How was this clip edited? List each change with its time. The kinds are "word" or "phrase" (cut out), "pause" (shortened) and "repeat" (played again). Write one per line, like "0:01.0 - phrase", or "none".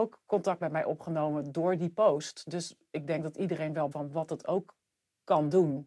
0:03.9 - phrase